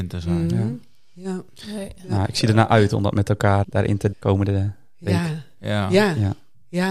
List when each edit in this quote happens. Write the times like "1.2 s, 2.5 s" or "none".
3.6 s, 4.1 s